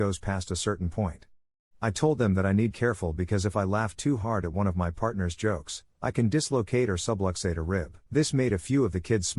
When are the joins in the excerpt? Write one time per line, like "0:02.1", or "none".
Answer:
0:02.7
0:08.1